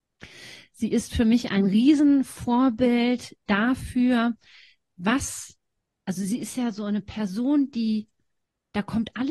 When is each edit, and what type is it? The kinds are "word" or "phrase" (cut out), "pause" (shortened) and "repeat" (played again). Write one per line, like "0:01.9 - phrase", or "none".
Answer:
none